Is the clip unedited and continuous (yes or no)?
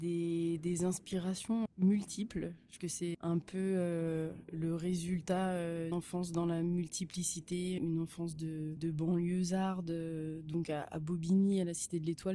no